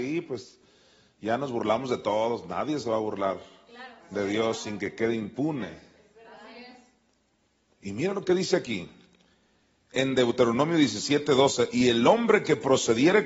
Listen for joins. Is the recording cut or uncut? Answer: uncut